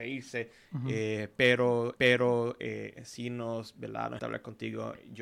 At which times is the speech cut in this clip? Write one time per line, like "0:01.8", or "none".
0:02.0
0:04.2